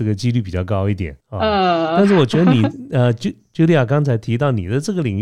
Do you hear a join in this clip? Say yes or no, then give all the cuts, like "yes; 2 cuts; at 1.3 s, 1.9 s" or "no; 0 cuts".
yes; 1 cut; at 1.2 s